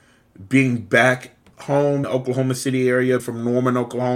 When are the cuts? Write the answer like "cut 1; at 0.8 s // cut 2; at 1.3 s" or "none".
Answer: cut 1; at 2.0 s // cut 2; at 3.2 s